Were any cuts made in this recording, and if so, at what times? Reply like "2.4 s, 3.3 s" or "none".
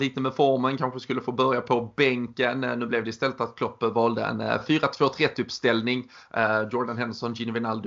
none